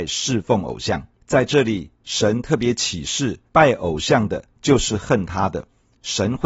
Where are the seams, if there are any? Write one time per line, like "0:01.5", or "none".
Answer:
0:01.1
0:03.5